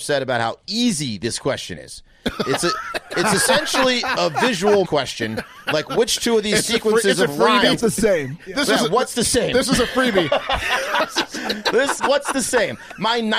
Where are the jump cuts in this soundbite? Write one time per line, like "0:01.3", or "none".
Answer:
0:04.8
0:07.8
0:12.0